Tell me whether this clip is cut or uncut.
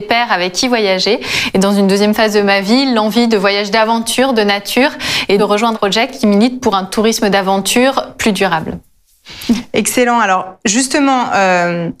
cut